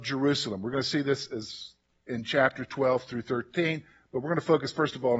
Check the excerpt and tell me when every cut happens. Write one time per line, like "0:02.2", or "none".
none